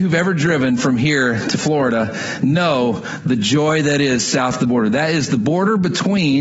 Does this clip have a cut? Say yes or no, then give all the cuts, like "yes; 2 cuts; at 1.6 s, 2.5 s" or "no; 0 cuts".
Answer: no; 0 cuts